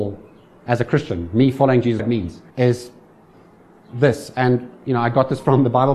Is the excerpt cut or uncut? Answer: cut